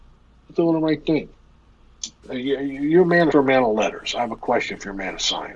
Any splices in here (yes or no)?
yes